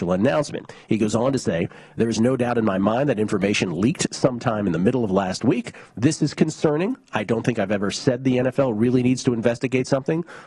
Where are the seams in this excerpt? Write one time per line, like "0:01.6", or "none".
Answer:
none